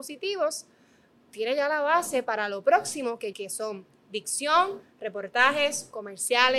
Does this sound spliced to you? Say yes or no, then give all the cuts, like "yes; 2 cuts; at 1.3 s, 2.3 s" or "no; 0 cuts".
yes; 1 cut; at 3.3 s